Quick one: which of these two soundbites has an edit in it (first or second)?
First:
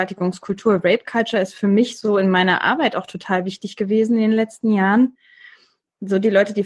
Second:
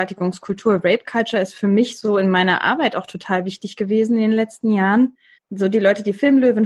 second